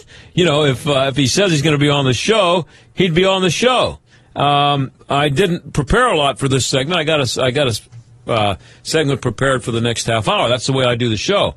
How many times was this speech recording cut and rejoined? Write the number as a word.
one